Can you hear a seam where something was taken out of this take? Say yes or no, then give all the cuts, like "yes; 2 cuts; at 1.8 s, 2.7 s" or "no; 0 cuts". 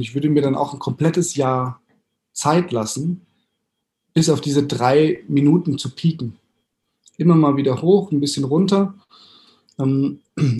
no; 0 cuts